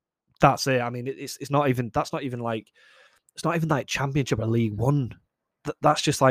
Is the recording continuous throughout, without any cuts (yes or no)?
yes